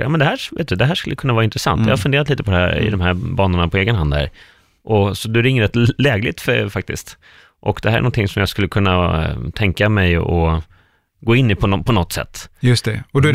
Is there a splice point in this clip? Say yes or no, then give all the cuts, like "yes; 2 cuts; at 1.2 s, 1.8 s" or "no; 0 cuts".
no; 0 cuts